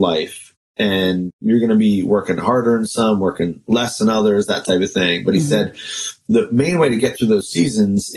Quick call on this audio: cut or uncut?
uncut